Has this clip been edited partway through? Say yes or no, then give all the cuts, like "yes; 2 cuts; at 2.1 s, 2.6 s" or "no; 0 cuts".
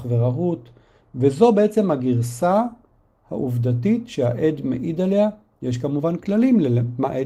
no; 0 cuts